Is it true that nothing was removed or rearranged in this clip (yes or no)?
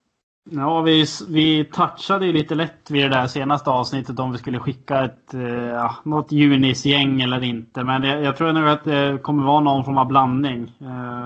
yes